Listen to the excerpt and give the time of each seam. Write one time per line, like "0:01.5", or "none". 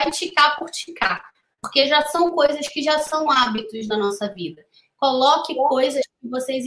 none